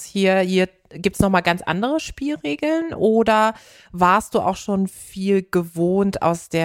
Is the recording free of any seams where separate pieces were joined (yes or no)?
yes